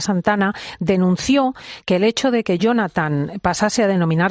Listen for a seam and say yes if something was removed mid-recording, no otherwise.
no